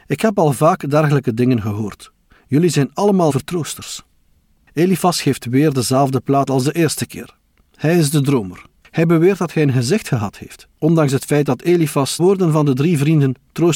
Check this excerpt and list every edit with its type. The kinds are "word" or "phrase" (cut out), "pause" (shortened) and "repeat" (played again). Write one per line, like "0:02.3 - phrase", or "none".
0:03.3 - word
0:06.5 - word
0:10.7 - pause
0:12.2 - word

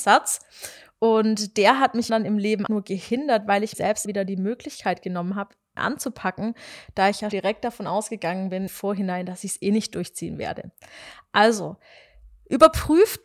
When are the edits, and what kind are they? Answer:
0:02.1 - word
0:02.7 - word
0:03.7 - word
0:04.1 - word
0:05.8 - word
0:07.3 - word
0:08.7 - word

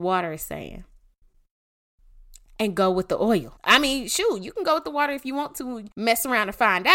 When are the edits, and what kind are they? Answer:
0:03.6 - pause
0:05.9 - pause

